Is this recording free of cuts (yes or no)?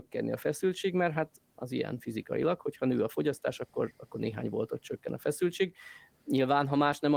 yes